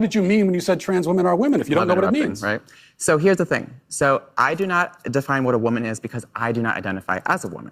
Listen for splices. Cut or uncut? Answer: uncut